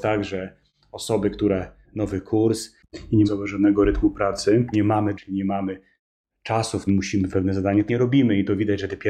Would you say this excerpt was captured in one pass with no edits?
no; 7 cuts; at 1.8 s, 3.2 s, 4.7 s, 5.1 s, 6.9 s, 7.3 s, 7.9 s

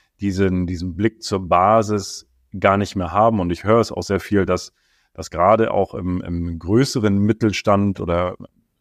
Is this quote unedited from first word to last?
yes; 0 cuts

